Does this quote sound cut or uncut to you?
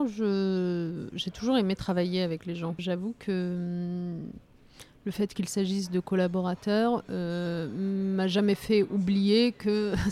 cut